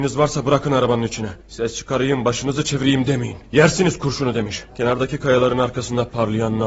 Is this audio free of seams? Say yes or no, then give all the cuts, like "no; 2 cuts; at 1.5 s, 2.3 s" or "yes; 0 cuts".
no; 3 cuts; at 1.4 s, 3.4 s, 4.7 s